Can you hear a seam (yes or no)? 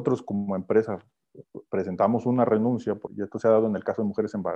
yes